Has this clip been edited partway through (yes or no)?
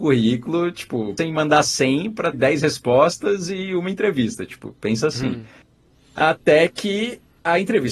yes